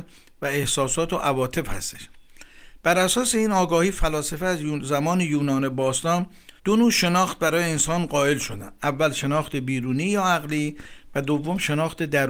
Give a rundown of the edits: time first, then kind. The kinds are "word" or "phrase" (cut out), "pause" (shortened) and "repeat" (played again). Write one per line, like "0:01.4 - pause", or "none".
0:06.6 - pause